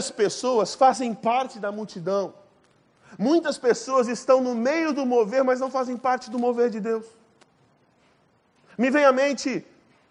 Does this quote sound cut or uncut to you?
uncut